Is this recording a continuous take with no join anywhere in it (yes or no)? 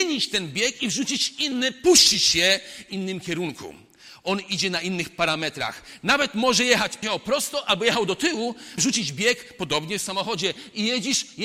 no